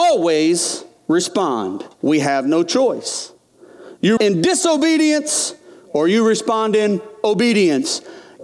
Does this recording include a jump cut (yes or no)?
yes